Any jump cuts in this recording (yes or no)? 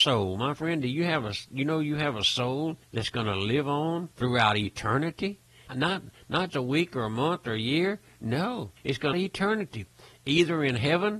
yes